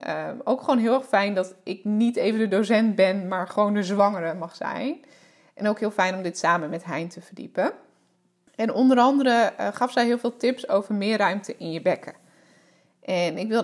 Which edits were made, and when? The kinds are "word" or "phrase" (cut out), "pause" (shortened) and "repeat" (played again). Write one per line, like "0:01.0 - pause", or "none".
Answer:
none